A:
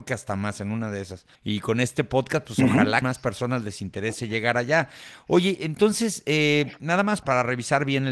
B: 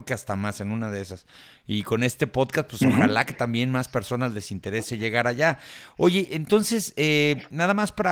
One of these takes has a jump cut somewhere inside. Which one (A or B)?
A